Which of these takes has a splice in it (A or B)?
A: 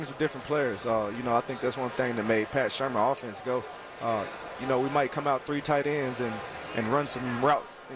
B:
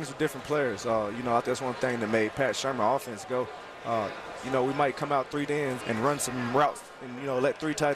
B